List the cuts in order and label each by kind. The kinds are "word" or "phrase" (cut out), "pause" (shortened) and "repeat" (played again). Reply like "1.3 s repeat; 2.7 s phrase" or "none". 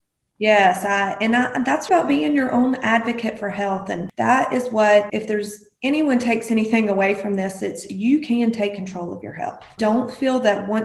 1.9 s word; 5.1 s word